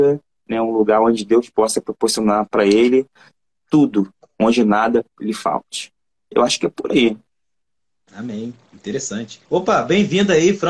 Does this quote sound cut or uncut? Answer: cut